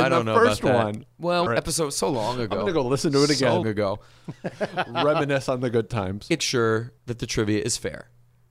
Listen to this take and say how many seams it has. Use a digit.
4